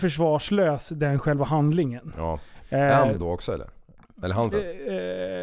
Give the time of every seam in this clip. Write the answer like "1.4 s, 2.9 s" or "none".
3.2 s, 4.5 s